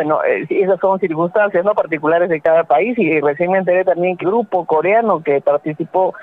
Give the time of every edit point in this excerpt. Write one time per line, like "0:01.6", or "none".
0:04.2